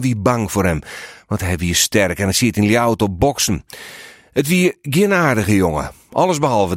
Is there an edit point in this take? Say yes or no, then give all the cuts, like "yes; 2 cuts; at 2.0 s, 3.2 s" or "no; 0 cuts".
no; 0 cuts